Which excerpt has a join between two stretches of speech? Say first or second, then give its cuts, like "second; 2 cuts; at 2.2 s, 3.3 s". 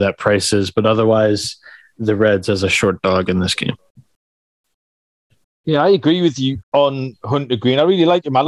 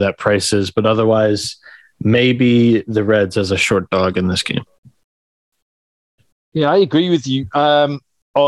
first; 2 cuts; at 2.0 s, 6.6 s